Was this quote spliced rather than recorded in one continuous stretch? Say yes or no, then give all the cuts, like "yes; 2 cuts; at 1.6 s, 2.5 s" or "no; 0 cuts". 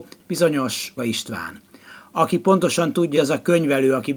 yes; 2 cuts; at 1.0 s, 3.1 s